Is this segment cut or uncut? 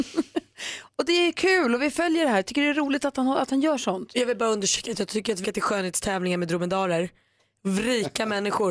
cut